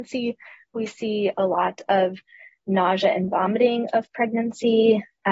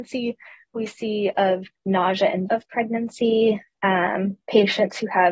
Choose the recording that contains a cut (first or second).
second